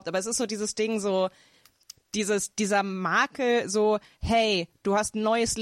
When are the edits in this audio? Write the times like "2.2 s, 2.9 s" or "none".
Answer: none